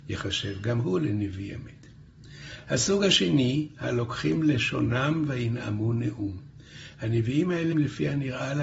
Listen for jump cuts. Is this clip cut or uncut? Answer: cut